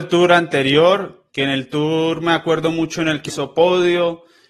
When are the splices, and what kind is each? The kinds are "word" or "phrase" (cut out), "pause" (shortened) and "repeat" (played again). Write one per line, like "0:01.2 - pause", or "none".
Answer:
0:03.3 - word

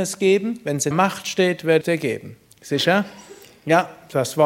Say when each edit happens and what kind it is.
0:00.9 - word
0:01.8 - word

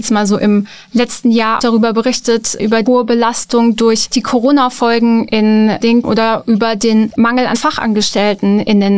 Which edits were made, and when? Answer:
0:01.6 - word
0:02.9 - word
0:06.0 - word
0:07.5 - word

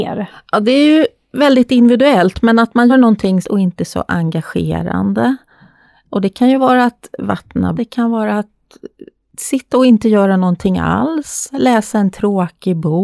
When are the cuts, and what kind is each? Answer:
0:02.9 - word
0:03.4 - phrase
0:07.8 - word

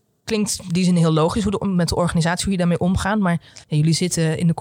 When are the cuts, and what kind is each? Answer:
0:03.6 - pause

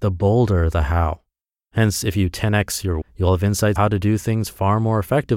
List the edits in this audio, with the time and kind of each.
0:03.0 - word
0:03.8 - word

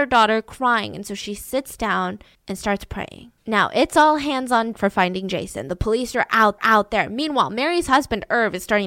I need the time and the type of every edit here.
0:02.3 - pause
0:03.4 - pause
0:04.7 - word
0:06.6 - repeat

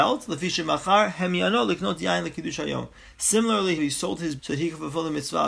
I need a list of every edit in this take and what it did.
0:03.8 - word
0:04.4 - word

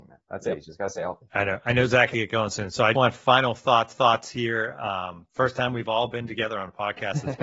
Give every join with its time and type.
0:01.3 - pause
0:02.1 - word
0:02.9 - word
0:03.9 - repeat

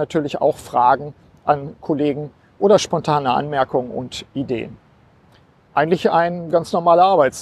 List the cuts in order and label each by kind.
none

